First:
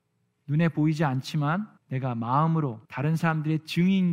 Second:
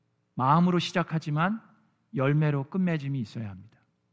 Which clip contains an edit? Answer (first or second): first